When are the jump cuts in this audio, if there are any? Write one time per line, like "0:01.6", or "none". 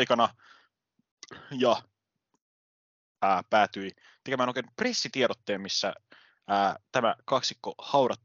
none